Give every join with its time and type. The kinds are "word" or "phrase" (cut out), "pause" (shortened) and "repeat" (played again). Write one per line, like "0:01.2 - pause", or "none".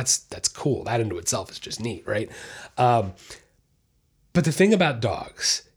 none